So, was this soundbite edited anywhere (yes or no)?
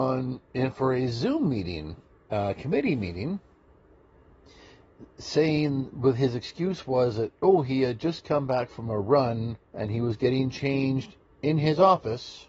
yes